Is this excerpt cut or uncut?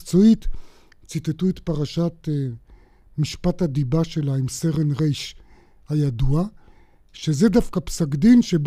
uncut